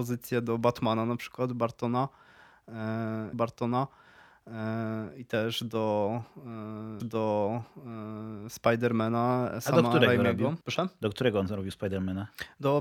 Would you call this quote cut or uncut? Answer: cut